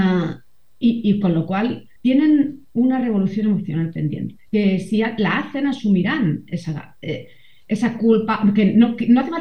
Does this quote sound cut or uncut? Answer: cut